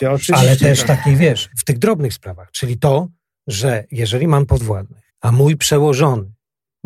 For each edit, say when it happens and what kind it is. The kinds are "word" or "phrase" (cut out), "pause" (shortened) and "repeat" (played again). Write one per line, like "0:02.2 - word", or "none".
0:05.1 - pause